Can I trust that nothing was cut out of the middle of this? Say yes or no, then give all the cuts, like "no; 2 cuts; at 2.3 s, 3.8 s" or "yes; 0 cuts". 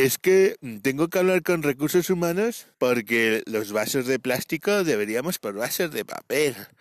no; 2 cuts; at 2.7 s, 5.4 s